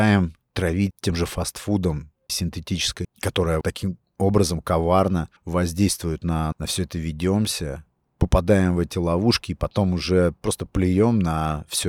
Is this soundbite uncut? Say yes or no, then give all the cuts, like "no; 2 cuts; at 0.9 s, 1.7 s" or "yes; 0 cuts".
no; 6 cuts; at 0.9 s, 2.3 s, 3.0 s, 3.6 s, 5.4 s, 6.5 s